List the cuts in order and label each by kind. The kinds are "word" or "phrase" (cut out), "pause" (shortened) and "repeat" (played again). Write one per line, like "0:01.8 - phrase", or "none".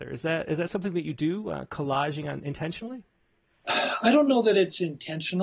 none